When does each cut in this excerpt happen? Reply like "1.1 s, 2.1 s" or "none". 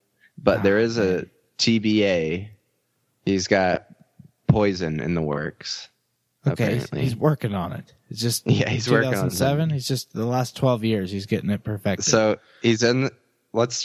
none